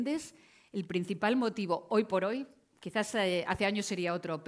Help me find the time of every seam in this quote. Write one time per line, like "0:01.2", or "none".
none